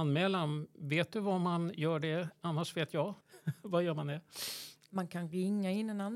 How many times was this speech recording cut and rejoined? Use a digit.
1